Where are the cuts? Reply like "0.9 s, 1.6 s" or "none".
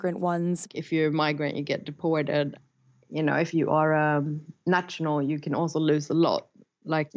none